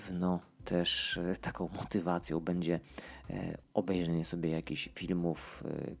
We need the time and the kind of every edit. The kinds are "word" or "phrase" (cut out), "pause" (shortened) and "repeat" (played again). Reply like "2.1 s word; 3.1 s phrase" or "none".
none